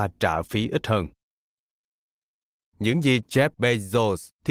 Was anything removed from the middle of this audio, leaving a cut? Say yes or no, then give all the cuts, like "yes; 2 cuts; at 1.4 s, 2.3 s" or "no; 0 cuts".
no; 0 cuts